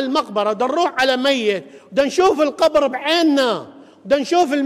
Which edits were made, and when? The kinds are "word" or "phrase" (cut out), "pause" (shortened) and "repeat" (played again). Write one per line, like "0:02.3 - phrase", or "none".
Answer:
none